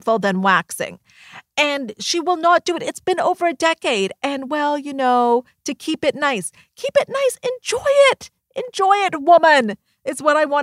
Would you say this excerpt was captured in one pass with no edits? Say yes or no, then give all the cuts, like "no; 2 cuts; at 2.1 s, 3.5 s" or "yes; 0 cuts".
yes; 0 cuts